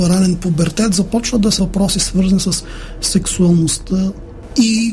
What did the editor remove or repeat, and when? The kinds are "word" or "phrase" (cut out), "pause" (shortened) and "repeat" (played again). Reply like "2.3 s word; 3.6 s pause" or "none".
1.6 s word